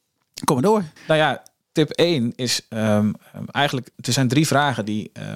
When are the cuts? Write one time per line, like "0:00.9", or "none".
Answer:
0:01.0
0:03.9